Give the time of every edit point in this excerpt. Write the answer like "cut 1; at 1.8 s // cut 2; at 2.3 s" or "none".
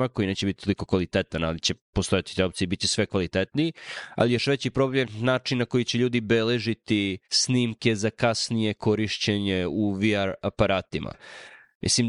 cut 1; at 7.2 s